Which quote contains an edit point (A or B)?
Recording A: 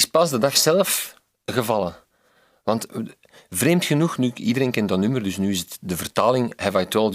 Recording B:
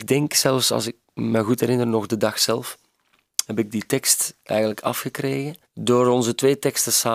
B